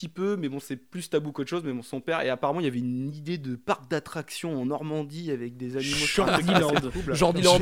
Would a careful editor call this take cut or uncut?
uncut